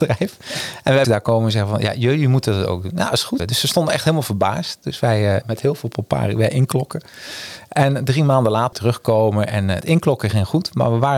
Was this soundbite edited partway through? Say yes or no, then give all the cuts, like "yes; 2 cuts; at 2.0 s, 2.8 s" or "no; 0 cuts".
yes; 5 cuts; at 1.0 s, 3.4 s, 5.4 s, 8.7 s, 9.8 s